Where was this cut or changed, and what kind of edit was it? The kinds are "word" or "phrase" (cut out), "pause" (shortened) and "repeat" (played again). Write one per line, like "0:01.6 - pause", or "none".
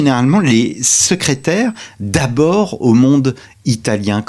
none